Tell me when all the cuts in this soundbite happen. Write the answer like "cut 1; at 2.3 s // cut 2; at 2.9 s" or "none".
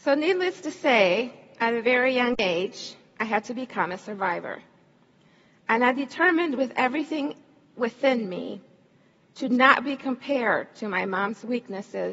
none